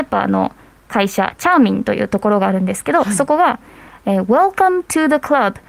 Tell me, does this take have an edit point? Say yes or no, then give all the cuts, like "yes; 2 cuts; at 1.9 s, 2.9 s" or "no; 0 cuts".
no; 0 cuts